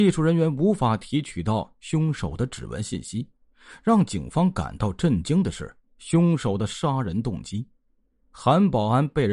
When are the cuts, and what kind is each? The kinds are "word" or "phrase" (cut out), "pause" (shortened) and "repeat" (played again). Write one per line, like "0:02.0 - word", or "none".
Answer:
none